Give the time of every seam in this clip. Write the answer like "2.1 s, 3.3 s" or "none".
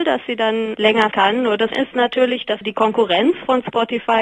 1.1 s, 1.7 s, 2.6 s